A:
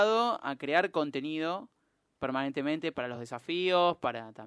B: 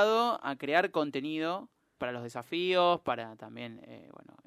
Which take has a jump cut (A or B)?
B